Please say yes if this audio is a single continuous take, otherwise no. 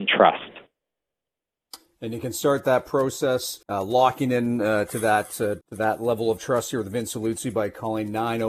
no